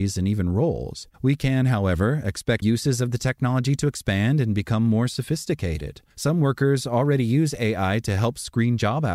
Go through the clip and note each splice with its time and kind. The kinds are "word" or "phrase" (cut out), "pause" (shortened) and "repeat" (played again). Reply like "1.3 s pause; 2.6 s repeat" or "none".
1.1 s pause; 2.6 s word; 6.1 s pause